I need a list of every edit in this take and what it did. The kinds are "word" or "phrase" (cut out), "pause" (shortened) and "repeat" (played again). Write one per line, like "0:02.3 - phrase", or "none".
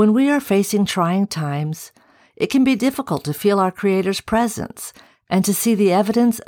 none